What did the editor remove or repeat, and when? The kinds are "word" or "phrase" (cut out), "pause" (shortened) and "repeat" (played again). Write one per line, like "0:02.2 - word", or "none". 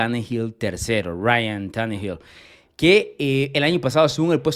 none